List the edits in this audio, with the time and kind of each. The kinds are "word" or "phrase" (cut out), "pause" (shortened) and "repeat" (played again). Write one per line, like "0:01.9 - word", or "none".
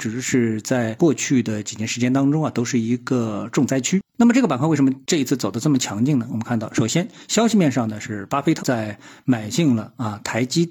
0:08.6 - word